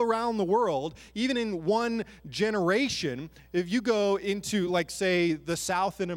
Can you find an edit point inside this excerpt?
no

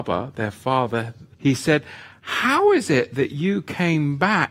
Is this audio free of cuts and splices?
no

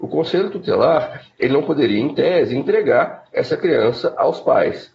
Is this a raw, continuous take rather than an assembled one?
yes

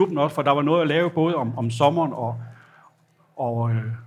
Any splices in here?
no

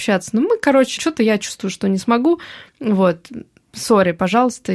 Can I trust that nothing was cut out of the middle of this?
no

